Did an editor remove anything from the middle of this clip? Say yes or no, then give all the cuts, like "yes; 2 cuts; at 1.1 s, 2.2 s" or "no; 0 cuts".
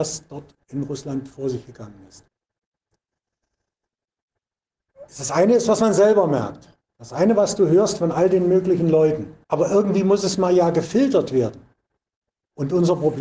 yes; 3 cuts; at 5.1 s, 6.9 s, 9.4 s